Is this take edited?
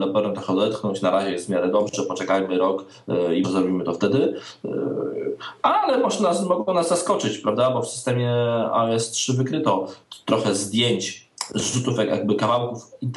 yes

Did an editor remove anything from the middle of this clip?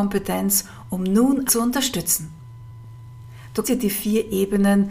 yes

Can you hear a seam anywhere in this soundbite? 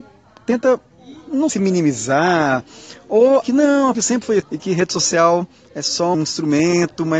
yes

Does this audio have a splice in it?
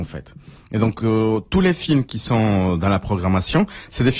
no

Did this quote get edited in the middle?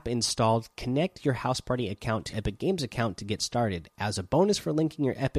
yes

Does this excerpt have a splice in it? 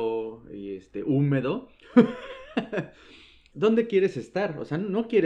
yes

